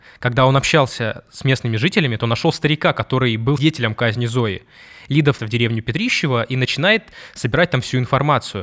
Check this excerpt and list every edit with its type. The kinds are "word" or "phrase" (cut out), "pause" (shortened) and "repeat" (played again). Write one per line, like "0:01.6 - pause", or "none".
0:03.6 - word
0:05.4 - word